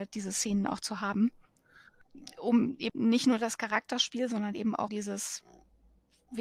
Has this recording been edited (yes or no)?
yes